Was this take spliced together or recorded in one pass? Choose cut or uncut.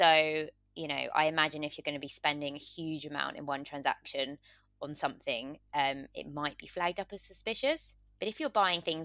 uncut